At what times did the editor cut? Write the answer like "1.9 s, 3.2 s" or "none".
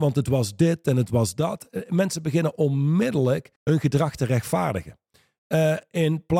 3.6 s